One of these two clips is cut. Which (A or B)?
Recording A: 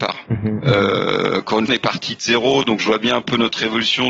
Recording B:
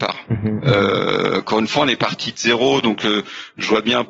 A